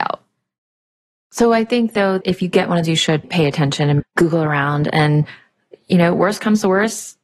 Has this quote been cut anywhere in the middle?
yes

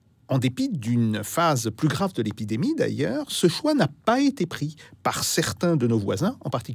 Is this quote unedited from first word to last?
yes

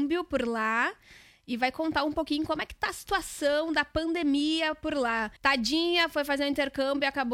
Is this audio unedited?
no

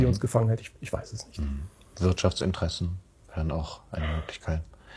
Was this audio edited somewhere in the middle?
no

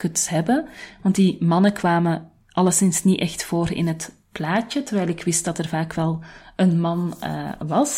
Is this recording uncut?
yes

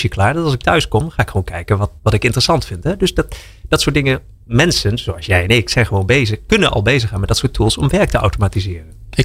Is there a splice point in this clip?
yes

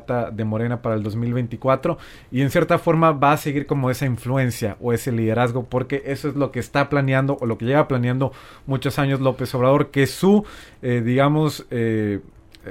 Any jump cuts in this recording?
no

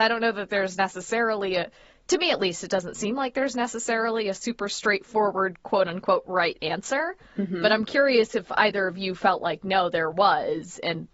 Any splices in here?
no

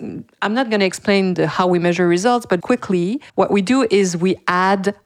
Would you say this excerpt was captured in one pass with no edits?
no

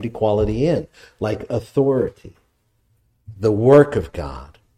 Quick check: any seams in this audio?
no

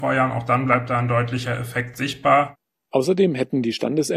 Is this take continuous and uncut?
yes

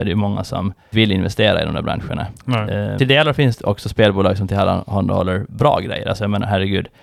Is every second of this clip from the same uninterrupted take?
no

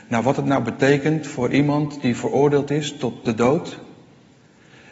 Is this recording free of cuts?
yes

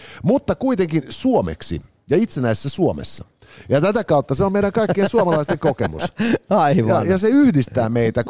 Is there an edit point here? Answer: no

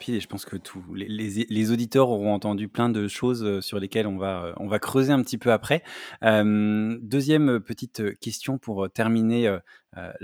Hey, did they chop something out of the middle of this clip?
no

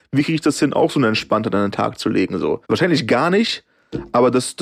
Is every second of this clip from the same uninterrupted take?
no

